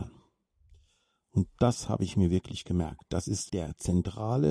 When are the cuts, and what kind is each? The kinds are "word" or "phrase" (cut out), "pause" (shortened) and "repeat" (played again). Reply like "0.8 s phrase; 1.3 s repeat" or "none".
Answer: 3.5 s word